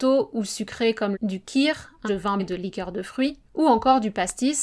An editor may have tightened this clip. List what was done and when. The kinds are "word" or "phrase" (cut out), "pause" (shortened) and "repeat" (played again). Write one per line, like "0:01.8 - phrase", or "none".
0:01.1 - phrase
0:02.1 - word
0:02.4 - word
0:03.5 - pause

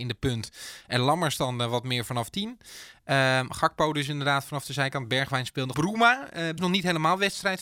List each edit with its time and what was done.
0:05.7 - phrase
0:06.6 - phrase

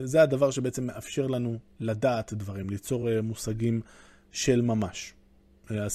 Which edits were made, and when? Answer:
none

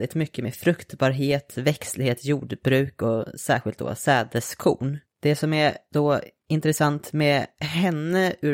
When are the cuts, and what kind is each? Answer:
0:05.0 - pause

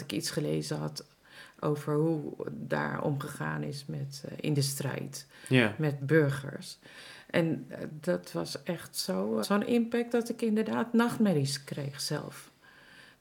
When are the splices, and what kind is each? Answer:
0:06.0 - word
0:09.4 - word

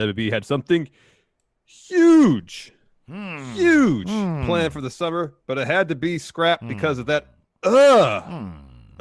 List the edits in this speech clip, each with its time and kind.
none

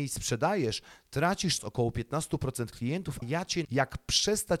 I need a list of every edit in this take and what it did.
0:01.6 - phrase
0:03.2 - word
0:03.6 - word

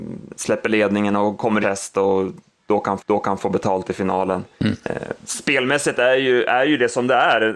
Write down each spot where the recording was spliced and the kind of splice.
0:01.6 - phrase
0:03.0 - repeat
0:04.5 - pause

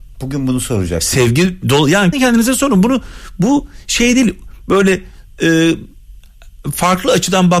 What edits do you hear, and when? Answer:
0:02.1 - word

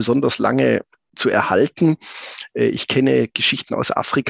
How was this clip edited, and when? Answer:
none

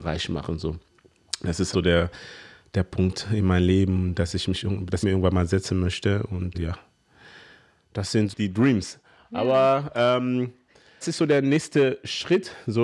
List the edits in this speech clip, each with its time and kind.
0:01.7 - word
0:05.0 - word
0:06.5 - word
0:08.3 - word
0:11.0 - word

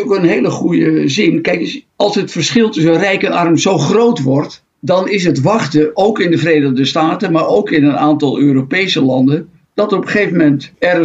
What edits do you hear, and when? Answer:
none

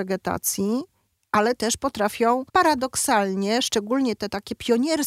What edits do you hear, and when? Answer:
0:02.5 - pause

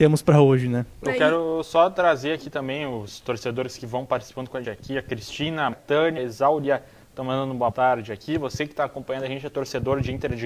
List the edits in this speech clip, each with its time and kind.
0:04.6 - word
0:05.7 - word
0:06.2 - word
0:07.7 - word

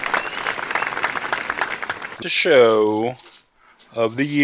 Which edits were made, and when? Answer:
0:02.2 - word

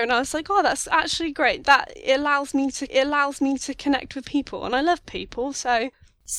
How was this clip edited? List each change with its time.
0:01.6 - word
0:02.9 - repeat
0:04.2 - word

